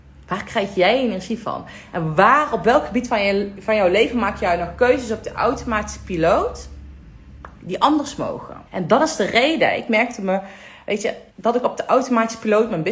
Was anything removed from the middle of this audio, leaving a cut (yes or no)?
yes